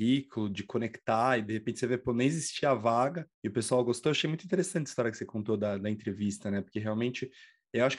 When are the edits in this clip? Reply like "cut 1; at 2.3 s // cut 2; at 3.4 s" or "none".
cut 1; at 3.3 s